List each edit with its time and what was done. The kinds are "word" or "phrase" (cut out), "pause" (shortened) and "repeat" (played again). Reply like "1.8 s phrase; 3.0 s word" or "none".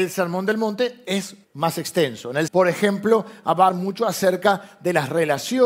1.4 s pause; 2.5 s phrase; 3.7 s word